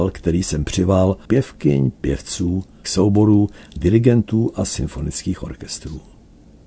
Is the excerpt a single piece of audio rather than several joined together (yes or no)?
no